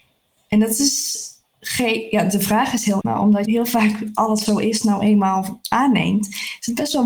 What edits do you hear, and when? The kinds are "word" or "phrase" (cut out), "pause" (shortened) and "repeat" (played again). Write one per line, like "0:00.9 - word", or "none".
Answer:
0:03.0 - word
0:03.4 - word
0:04.4 - word